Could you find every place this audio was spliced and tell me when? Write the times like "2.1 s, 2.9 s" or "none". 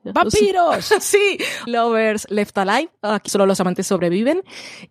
1.7 s, 3.3 s